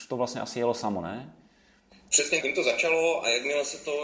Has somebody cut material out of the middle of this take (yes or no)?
yes